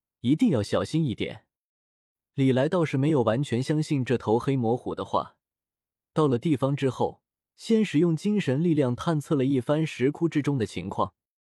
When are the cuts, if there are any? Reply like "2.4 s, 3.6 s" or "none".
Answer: none